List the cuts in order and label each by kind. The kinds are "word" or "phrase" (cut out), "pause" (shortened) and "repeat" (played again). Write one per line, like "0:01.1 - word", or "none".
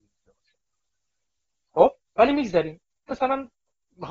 0:02.0 - pause
0:03.1 - word